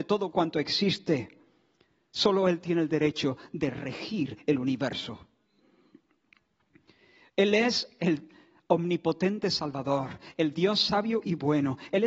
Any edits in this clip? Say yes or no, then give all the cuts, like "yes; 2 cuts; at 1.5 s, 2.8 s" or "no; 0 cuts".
no; 0 cuts